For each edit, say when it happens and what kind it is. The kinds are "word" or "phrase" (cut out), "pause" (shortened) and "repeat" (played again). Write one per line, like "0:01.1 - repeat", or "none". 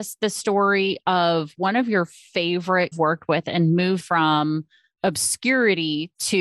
0:02.9 - phrase
0:04.0 - word